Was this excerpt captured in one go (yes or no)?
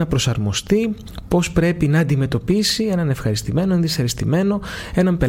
yes